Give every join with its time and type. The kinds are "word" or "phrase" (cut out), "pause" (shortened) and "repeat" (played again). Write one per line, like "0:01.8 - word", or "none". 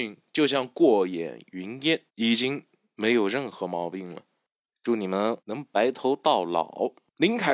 0:02.1 - pause
0:05.4 - pause

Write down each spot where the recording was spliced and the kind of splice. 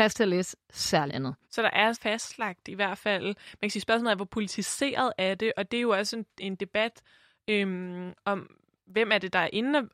0:01.1 - word
0:01.4 - pause
0:01.9 - phrase

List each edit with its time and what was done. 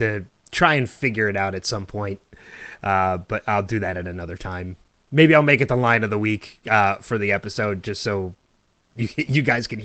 none

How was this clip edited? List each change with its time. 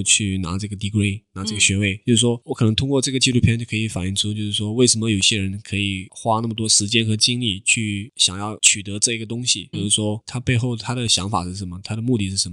0:09.7 - word

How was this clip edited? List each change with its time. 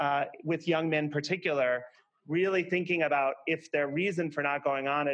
none

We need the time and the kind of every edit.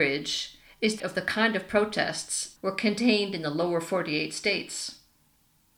0:01.0 - word
0:02.6 - phrase

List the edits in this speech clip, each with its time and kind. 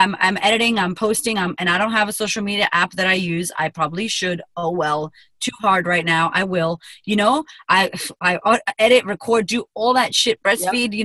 none

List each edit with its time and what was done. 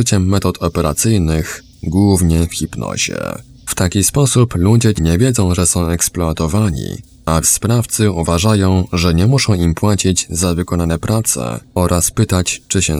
0:05.0 - word
0:07.4 - word

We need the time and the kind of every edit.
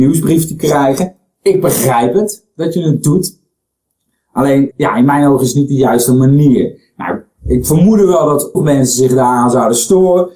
0:04.7 - word
0:08.5 - word

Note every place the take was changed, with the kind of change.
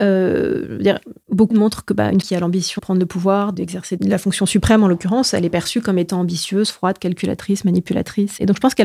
0:01.5 - word
0:02.2 - word
0:02.8 - word

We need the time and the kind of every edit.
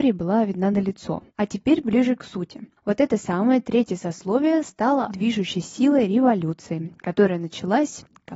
0:01.3 - pause
0:02.8 - pause
0:05.1 - word

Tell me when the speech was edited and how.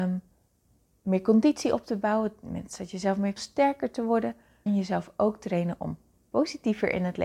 0:03.4 - phrase
0:04.7 - word

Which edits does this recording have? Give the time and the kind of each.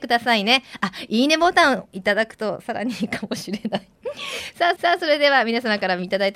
0:04.8 - repeat

